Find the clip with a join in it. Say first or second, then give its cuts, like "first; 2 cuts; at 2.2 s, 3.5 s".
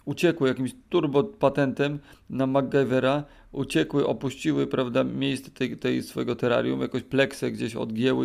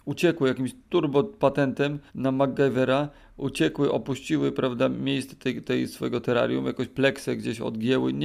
second; 1 cut; at 2.1 s